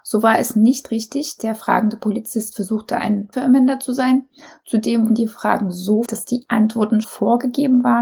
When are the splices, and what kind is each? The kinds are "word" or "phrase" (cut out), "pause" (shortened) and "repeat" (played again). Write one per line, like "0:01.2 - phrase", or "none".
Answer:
0:01.4 - word
0:03.3 - word
0:05.1 - word
0:06.0 - word
0:07.0 - word